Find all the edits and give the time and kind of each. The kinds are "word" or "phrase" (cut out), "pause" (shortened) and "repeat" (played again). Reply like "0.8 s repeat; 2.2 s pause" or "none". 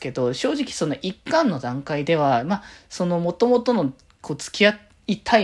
none